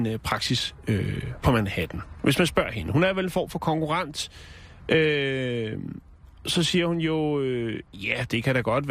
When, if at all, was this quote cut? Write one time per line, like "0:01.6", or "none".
0:07.9